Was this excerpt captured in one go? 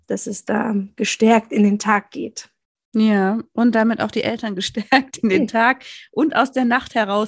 yes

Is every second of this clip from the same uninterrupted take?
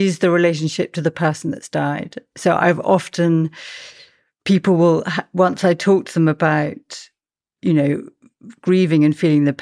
yes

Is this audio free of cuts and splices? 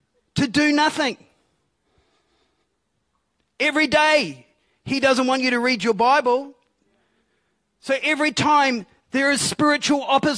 yes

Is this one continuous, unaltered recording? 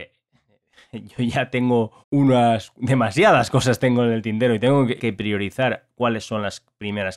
no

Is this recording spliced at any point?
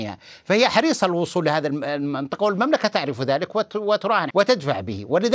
yes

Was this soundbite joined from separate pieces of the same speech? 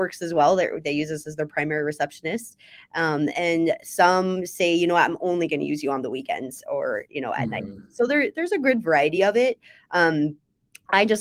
no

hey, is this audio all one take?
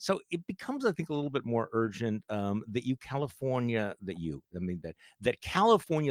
yes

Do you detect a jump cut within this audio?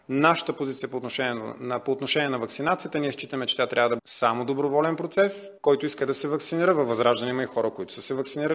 yes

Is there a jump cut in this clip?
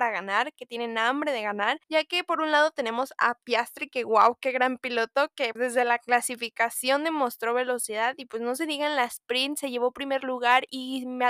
yes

